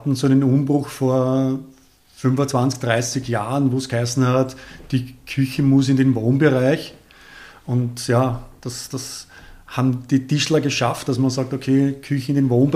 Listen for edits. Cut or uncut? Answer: uncut